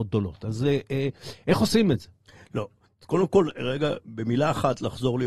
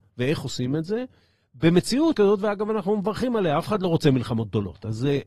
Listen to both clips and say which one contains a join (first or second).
second